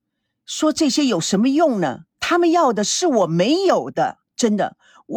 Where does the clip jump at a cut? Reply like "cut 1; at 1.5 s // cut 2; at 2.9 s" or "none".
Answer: cut 1; at 2.1 s // cut 2; at 4.3 s